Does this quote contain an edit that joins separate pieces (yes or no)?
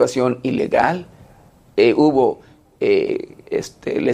no